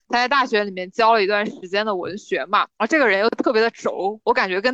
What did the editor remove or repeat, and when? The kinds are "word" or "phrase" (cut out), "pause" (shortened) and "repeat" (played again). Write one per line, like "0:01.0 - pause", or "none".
0:02.7 - pause